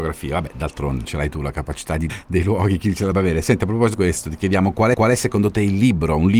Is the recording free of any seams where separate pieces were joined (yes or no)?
no